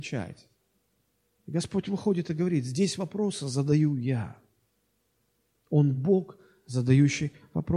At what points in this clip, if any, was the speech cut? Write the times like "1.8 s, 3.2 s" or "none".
none